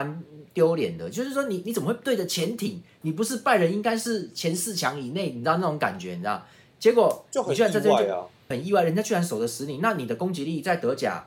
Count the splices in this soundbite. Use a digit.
1